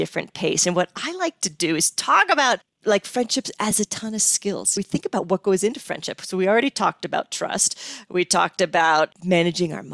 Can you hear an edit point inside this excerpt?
no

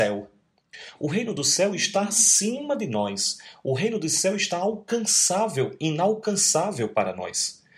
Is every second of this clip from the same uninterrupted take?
yes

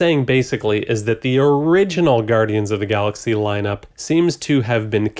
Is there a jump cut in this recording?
yes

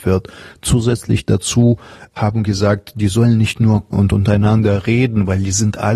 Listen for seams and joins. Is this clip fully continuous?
no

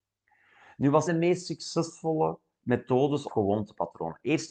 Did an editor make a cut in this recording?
yes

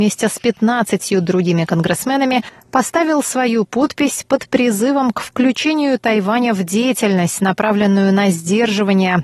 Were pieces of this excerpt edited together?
no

